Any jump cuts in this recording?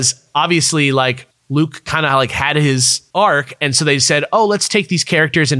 yes; 1 cut; at 1.3 s

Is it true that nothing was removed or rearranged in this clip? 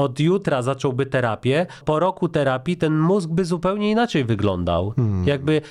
no; 1 cut; at 1.8 s

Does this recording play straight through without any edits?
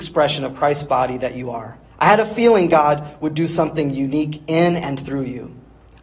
no; 1 cut; at 1.8 s

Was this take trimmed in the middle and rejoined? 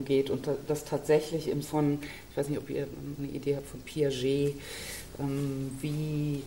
yes; 2 cuts; at 1.6 s, 3.2 s

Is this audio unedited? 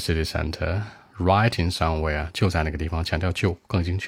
yes; 0 cuts

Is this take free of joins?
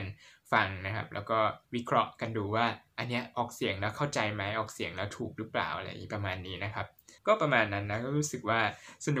no; 2 cuts; at 1.6 s, 7.2 s

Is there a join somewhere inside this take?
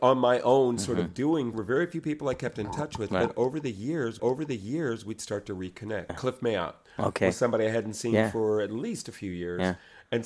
yes; 3 cuts; at 1.5 s, 4.2 s, 6.1 s

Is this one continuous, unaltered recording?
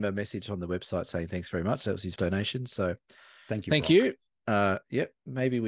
no; 1 cut; at 2.2 s

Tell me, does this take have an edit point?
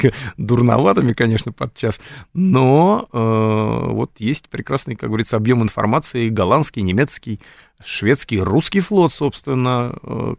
no; 0 cuts

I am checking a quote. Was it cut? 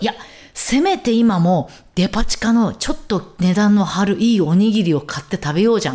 no; 0 cuts

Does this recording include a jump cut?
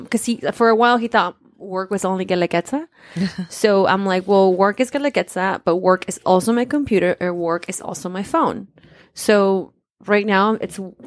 no; 0 cuts

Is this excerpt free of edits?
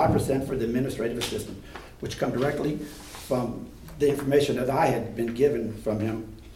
yes; 0 cuts

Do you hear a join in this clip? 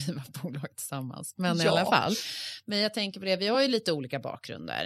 no; 0 cuts

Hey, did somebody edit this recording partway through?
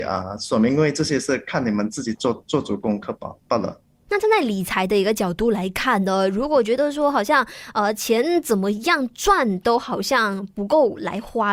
yes; 1 cut; at 3.9 s

